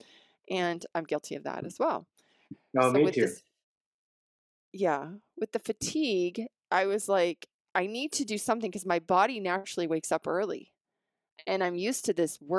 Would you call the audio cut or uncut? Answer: uncut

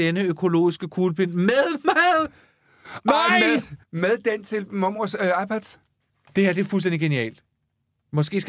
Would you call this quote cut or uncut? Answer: cut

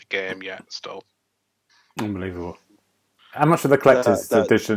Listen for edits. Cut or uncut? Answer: uncut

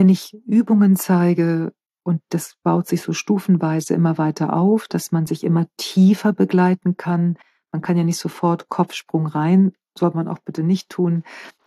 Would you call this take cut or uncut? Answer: uncut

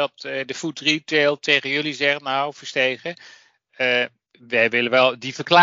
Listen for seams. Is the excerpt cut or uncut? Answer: uncut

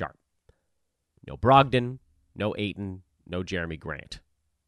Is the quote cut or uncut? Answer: uncut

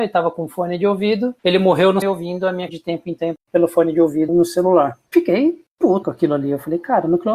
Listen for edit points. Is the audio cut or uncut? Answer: cut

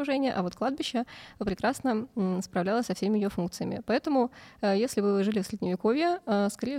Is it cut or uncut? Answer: uncut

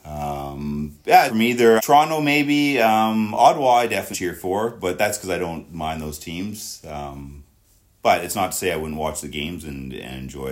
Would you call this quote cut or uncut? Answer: cut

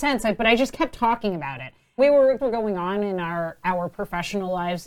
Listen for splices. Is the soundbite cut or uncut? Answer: cut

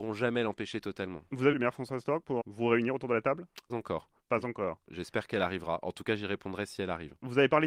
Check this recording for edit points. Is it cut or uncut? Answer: cut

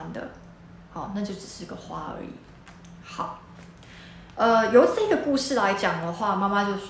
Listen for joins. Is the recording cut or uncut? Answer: uncut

